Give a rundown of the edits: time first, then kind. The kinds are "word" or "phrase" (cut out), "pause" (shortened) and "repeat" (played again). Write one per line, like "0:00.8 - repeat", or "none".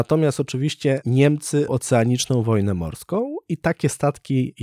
0:01.7 - word